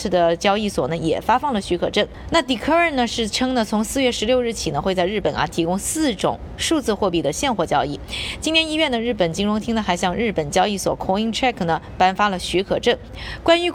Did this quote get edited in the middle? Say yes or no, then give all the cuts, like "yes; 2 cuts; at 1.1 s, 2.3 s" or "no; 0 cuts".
no; 0 cuts